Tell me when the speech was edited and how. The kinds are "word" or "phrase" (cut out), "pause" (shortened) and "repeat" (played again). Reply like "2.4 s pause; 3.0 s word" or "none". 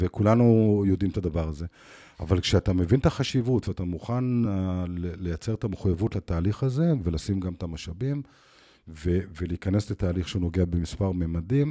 none